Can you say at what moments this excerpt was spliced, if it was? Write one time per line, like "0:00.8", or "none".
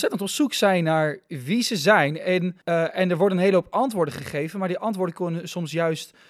0:02.6